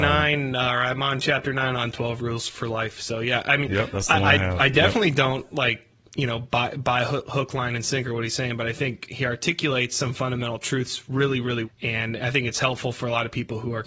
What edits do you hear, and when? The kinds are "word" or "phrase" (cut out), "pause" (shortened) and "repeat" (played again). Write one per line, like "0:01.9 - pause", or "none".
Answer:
0:11.6 - word